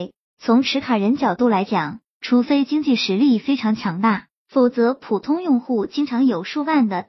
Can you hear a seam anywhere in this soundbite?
no; 0 cuts

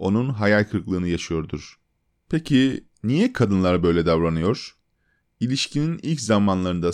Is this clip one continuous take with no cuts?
yes; 0 cuts

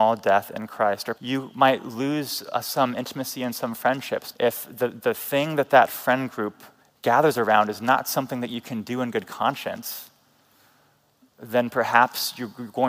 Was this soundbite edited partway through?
yes; 3 cuts; at 1.1 s, 4.3 s, 6.8 s

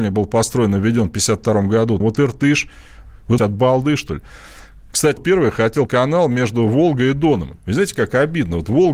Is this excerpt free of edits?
no; 4 cuts; at 2.0 s, 3.4 s, 5.2 s, 5.9 s

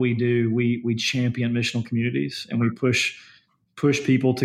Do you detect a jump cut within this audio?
no; 0 cuts

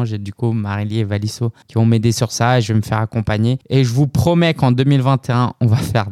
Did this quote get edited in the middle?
yes; 2 cuts; at 1.6 s, 3.6 s

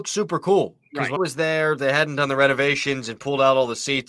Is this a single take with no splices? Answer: no; 1 cut; at 1.2 s

